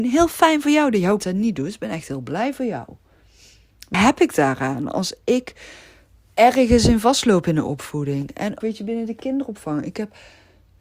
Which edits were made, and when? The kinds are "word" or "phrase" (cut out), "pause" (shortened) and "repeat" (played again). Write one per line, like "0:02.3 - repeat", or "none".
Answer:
0:01.2 - word
0:03.9 - word
0:08.6 - word